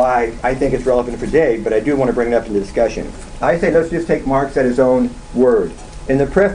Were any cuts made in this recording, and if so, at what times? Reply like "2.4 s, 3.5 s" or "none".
none